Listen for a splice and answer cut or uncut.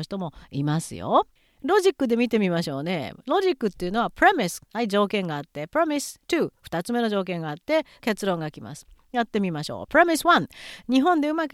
cut